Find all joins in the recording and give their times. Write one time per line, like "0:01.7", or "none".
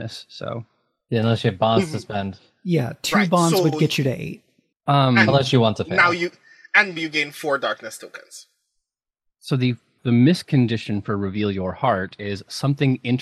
0:07.0